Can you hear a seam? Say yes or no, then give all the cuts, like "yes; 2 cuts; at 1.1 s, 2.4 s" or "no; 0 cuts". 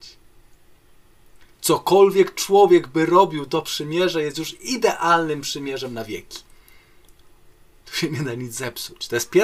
no; 0 cuts